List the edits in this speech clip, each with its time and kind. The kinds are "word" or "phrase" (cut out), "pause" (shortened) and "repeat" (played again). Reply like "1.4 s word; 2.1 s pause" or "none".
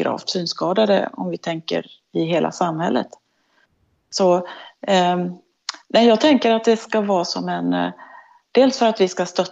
none